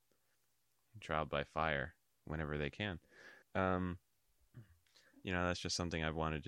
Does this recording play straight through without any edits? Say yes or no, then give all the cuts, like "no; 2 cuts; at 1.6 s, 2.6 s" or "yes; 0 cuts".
no; 2 cuts; at 1.0 s, 3.4 s